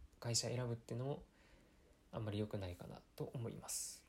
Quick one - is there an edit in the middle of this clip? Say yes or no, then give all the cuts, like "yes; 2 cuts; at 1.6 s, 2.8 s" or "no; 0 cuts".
no; 0 cuts